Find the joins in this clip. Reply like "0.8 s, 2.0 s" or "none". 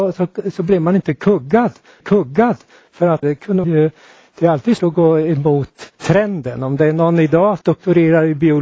2.0 s, 3.2 s, 3.6 s, 4.8 s, 5.9 s, 7.6 s